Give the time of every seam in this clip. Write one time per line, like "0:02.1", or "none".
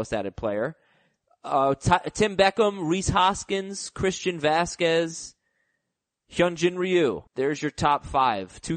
0:07.3